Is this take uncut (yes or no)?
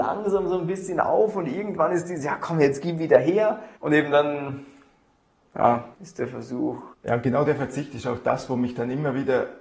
no